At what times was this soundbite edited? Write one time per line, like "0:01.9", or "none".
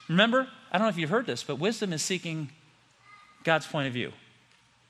none